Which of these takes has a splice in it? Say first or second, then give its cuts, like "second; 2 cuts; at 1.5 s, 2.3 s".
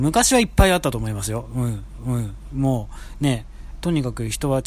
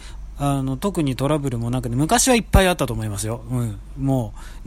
first; 1 cut; at 2.0 s